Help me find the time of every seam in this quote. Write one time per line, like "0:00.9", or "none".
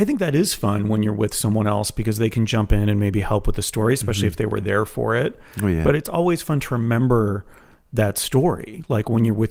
none